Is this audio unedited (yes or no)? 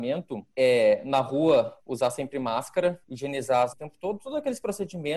no